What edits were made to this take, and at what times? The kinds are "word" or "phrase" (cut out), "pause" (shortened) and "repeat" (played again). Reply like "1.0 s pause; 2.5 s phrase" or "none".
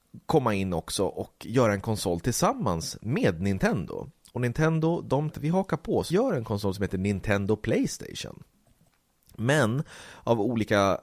5.3 s word; 6.1 s word